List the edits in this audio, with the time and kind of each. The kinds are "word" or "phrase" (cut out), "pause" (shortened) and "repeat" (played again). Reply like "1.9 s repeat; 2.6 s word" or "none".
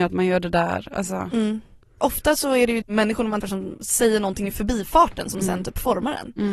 2.8 s word; 3.4 s word